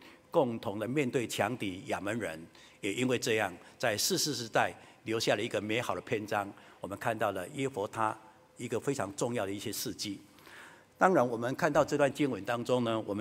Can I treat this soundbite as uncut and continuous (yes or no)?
yes